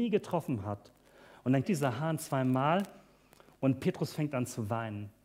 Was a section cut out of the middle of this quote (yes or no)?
yes